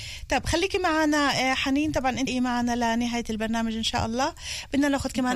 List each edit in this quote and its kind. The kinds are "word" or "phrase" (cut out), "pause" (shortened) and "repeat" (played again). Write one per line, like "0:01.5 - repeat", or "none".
0:02.3 - word